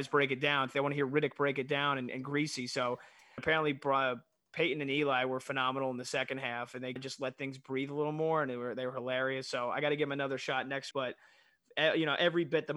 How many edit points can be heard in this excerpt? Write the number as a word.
three